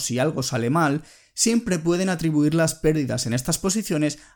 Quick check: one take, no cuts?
yes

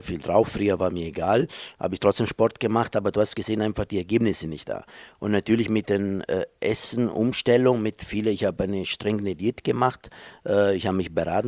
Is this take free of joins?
yes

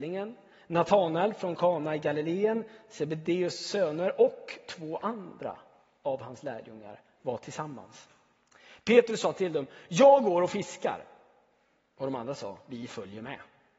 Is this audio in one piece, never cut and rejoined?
yes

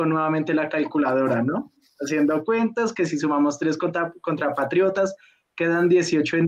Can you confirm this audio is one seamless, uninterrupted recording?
yes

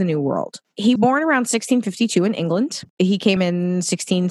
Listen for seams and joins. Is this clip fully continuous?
no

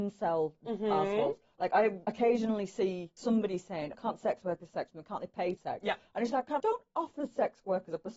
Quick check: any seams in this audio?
yes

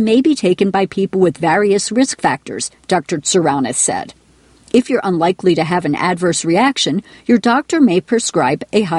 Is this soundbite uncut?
yes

